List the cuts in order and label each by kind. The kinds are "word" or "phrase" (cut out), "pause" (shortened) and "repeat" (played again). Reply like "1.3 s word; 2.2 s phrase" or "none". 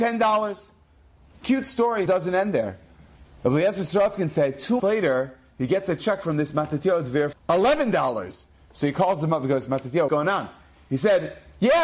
2.1 s phrase; 4.8 s word; 7.3 s word; 10.1 s word